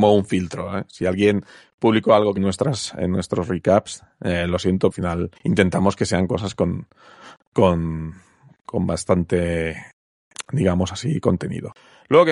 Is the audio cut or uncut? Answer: cut